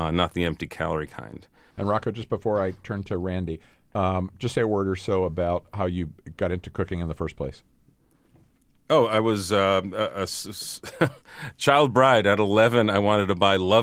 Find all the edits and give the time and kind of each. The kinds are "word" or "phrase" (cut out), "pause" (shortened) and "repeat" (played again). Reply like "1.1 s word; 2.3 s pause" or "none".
none